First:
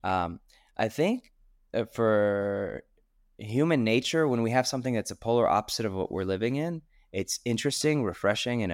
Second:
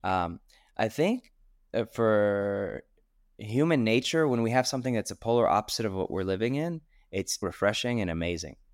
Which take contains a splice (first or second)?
second